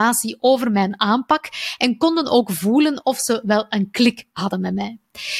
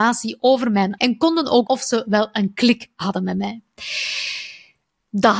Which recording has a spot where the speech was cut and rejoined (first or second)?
second